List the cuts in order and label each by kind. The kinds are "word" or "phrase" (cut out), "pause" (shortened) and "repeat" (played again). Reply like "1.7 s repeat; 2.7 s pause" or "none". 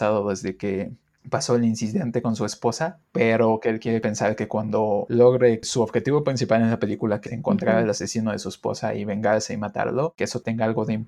7.3 s word